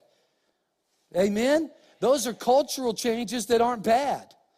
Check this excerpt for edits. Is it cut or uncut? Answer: uncut